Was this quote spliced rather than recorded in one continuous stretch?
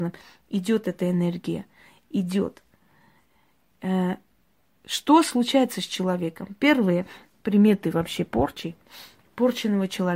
no; 0 cuts

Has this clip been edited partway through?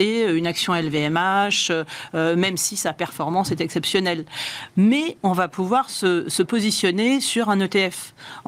no; 0 cuts

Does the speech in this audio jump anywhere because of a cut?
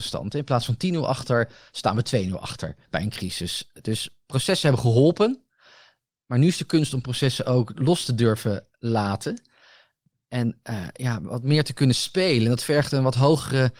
yes; 1 cut; at 2.8 s

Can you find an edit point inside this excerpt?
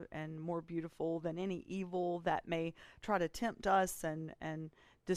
no; 0 cuts

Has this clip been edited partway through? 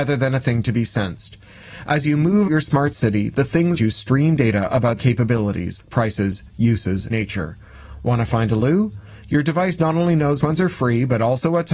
yes; 6 cuts; at 2.5 s, 3.8 s, 5.0 s, 5.8 s, 7.1 s, 10.4 s

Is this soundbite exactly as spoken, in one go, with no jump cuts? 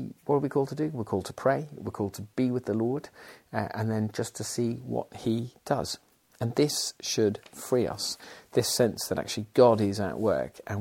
yes; 0 cuts

